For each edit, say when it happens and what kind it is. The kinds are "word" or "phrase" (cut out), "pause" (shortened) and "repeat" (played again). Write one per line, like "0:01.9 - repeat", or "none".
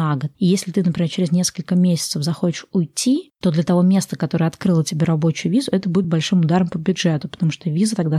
none